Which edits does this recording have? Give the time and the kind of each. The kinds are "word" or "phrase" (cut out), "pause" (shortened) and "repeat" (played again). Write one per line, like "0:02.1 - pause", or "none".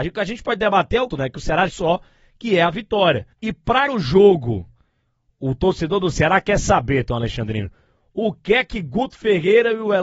0:01.1 - phrase
0:01.7 - phrase
0:03.3 - pause
0:03.9 - word